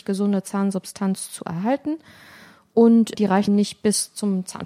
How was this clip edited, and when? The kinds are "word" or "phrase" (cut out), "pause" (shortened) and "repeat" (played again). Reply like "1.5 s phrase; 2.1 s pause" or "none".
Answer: 3.1 s word; 3.5 s phrase